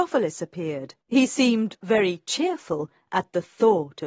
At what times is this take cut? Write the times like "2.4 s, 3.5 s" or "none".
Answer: 1.0 s